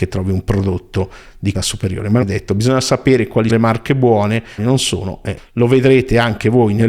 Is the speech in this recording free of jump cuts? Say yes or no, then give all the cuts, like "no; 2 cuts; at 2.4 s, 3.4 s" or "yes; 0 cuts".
no; 5 cuts; at 1.5 s, 2.2 s, 3.5 s, 4.6 s, 5.4 s